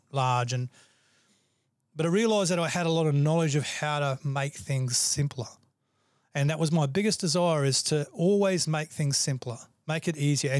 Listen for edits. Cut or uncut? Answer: uncut